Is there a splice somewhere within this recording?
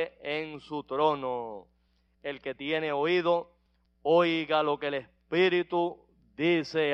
no; 0 cuts

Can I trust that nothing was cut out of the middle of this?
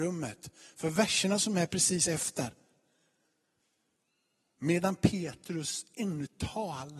yes; 0 cuts

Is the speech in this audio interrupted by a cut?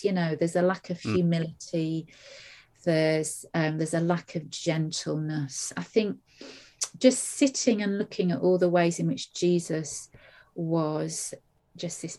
no; 0 cuts

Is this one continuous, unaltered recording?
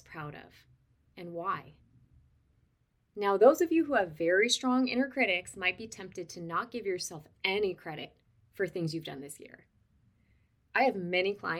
yes; 0 cuts

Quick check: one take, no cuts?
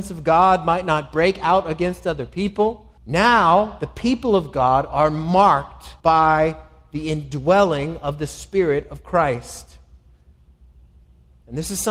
no; 2 cuts; at 3.0 s, 6.0 s

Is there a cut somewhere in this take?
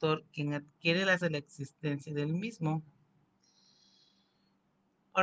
yes; 1 cut; at 1.2 s

